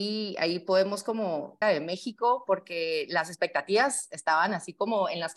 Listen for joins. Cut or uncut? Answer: cut